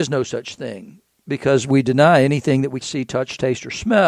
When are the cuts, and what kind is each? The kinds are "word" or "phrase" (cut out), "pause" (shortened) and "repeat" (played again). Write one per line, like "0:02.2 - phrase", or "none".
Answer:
0:01.1 - pause
0:02.8 - word